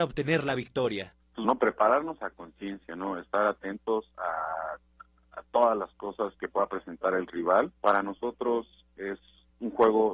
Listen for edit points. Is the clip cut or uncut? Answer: cut